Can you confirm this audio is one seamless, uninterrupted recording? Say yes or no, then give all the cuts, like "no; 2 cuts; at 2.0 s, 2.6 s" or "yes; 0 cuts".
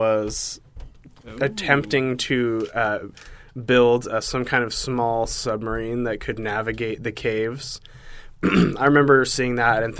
yes; 0 cuts